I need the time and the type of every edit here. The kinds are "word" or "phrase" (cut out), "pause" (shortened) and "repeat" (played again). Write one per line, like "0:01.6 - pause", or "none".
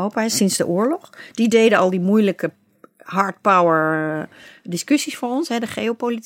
none